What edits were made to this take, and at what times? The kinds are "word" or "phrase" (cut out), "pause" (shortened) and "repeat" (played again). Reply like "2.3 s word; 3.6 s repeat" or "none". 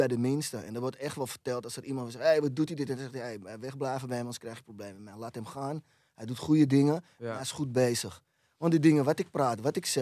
none